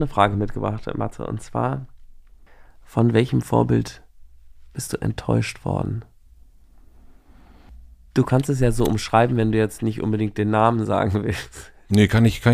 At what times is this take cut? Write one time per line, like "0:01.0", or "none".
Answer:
none